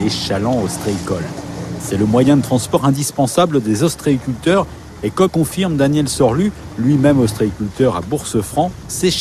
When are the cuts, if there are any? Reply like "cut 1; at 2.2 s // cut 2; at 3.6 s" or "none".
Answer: cut 1; at 5.3 s